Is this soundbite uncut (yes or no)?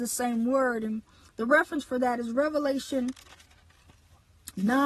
yes